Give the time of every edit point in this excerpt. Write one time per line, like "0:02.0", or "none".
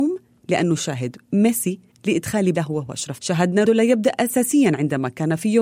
0:01.9
0:02.5
0:03.2
0:03.7